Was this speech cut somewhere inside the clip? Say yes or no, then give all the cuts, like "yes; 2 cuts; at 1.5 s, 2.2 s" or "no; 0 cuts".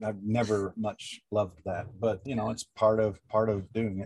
yes; 1 cut; at 2.2 s